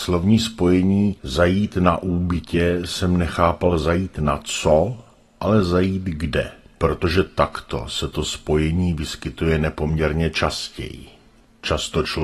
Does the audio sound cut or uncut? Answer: uncut